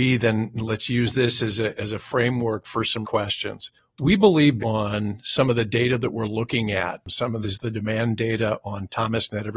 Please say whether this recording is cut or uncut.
cut